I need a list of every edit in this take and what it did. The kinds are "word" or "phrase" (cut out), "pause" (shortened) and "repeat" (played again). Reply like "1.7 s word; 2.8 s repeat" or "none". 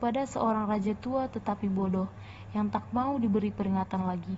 none